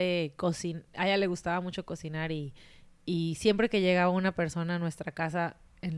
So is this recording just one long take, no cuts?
yes; 0 cuts

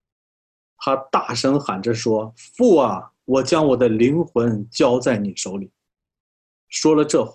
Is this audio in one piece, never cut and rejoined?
yes; 0 cuts

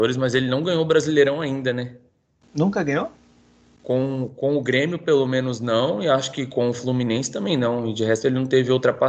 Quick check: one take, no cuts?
yes; 0 cuts

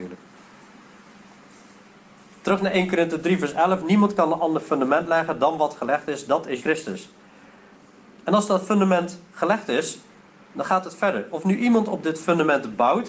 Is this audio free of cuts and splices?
no; 1 cut; at 6.6 s

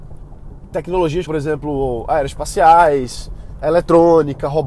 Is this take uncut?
no; 2 cuts; at 1.3 s, 3.6 s

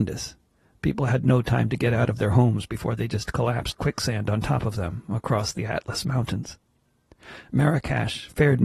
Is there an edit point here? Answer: yes; 1 cut; at 3.7 s

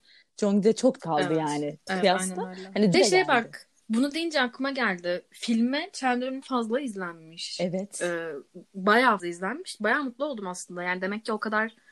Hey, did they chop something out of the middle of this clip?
yes; 6 cuts; at 1.0 s, 1.9 s, 2.9 s, 3.8 s, 6.4 s, 9.2 s

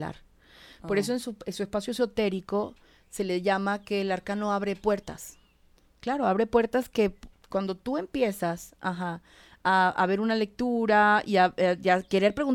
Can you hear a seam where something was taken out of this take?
no; 0 cuts

